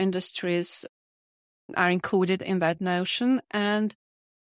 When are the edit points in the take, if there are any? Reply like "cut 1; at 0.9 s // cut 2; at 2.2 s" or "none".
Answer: none